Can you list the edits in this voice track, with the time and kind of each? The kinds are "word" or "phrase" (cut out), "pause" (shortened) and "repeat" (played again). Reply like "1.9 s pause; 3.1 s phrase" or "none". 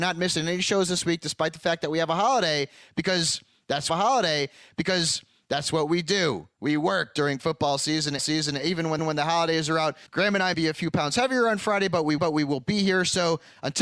3.9 s repeat; 6.5 s pause; 8.2 s repeat; 9.0 s repeat; 10.1 s pause; 10.5 s word; 12.2 s repeat